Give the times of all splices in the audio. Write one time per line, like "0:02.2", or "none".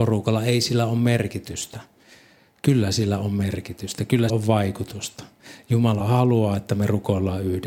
0:04.3
0:06.0